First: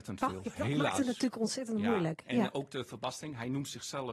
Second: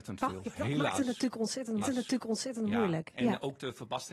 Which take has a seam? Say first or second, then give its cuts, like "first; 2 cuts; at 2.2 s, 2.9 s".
second; 1 cut; at 1.8 s